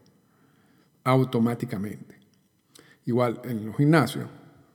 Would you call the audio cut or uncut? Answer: uncut